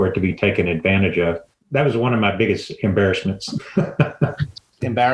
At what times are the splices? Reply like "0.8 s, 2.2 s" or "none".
1.5 s